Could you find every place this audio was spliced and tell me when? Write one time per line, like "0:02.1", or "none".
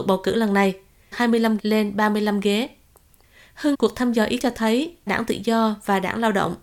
0:01.1
0:01.6
0:03.7
0:04.4
0:05.1